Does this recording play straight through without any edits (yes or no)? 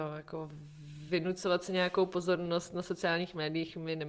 yes